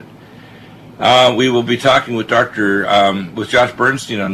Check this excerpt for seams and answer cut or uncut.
uncut